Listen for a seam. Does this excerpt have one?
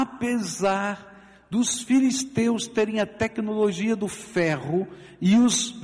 no; 0 cuts

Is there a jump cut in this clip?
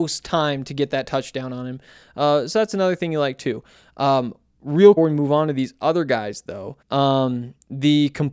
yes; 2 cuts; at 5.0 s, 6.8 s

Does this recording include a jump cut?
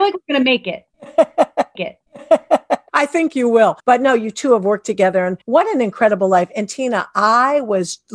yes; 3 cuts; at 1.8 s, 3.8 s, 5.4 s

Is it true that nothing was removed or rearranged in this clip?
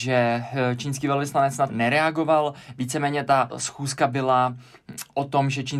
no; 2 cuts; at 1.7 s, 3.5 s

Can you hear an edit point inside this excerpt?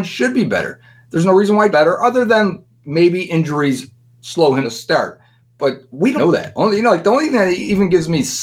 yes; 3 cuts; at 1.7 s, 4.6 s, 6.2 s

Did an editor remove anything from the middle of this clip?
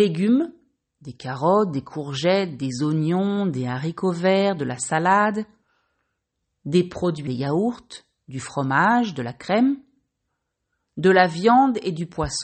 yes; 1 cut; at 7.3 s

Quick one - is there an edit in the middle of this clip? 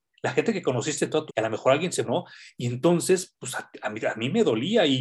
yes; 2 cuts; at 1.3 s, 2.0 s

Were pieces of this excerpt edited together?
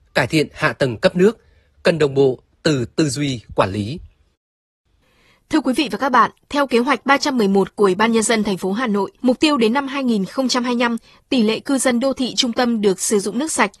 yes; 1 cut; at 9.2 s

